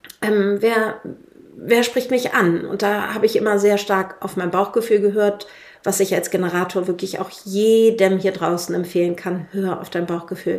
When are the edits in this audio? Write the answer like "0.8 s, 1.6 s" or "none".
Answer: none